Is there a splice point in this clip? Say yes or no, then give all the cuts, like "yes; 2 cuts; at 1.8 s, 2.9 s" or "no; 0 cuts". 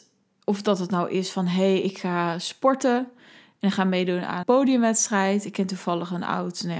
yes; 1 cut; at 4.4 s